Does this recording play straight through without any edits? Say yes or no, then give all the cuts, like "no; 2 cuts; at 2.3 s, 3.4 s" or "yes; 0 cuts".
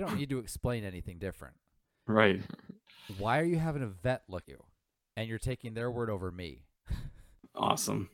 no; 1 cut; at 4.4 s